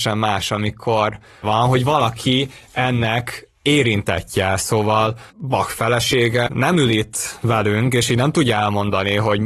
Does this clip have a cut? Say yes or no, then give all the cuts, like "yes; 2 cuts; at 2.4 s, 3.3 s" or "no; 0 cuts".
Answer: yes; 2 cuts; at 1.4 s, 5.3 s